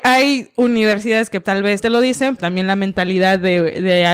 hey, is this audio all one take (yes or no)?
no